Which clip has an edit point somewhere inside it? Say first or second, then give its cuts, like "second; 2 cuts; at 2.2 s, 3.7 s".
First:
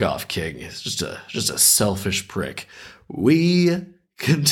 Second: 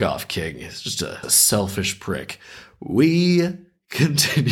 second; 1 cut; at 1.2 s